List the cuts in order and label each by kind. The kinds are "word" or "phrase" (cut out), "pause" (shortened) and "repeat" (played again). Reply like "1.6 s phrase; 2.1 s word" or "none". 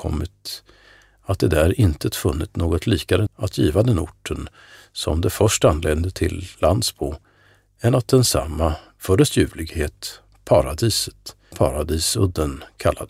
3.3 s word; 11.5 s word